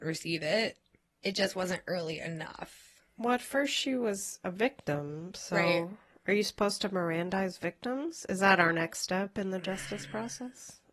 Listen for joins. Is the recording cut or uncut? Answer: uncut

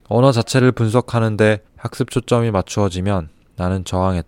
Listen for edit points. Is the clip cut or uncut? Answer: cut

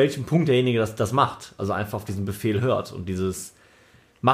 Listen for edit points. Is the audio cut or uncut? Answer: uncut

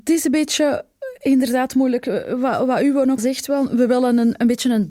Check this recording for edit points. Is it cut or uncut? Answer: cut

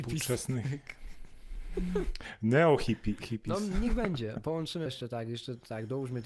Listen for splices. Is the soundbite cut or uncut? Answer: cut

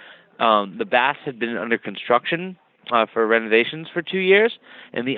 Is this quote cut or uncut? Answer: uncut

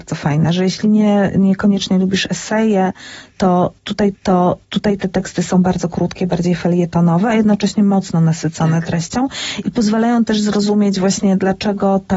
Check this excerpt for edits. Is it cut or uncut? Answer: cut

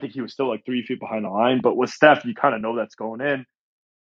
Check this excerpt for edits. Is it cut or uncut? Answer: uncut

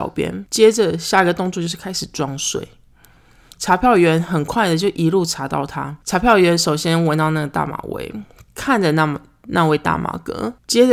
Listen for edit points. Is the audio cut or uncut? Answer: uncut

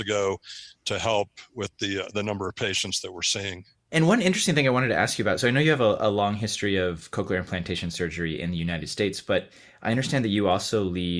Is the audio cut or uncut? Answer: uncut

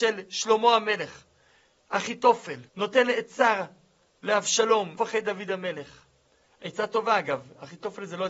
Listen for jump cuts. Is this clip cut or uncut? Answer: cut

